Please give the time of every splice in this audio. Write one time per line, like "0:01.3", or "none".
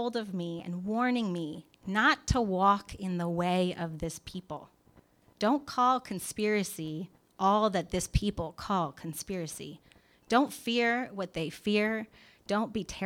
none